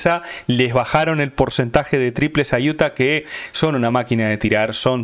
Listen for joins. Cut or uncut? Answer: uncut